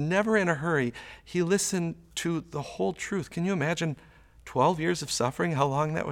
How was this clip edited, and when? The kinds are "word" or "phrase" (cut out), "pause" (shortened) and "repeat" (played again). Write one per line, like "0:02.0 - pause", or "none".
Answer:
none